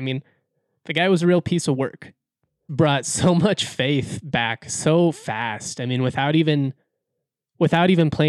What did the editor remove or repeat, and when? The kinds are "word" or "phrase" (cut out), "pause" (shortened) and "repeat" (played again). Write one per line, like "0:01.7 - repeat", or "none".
0:02.7 - phrase